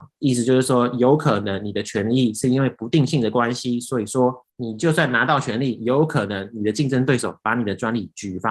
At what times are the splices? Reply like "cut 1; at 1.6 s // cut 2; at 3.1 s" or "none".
cut 1; at 4.5 s